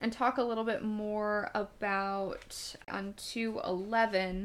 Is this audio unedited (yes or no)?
no